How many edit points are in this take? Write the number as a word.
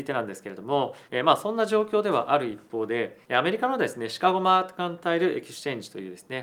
two